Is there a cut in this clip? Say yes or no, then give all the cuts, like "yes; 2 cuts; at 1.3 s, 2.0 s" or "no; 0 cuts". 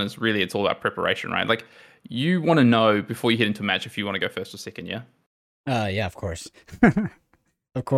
no; 0 cuts